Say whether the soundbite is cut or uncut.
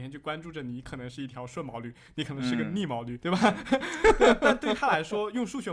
cut